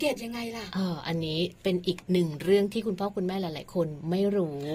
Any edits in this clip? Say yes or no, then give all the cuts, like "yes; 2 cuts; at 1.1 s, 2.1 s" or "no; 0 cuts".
yes; 1 cut; at 1.6 s